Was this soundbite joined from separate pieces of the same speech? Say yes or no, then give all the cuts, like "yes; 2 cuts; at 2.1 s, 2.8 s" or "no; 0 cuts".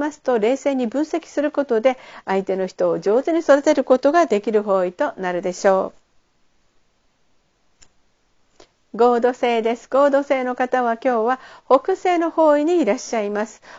no; 0 cuts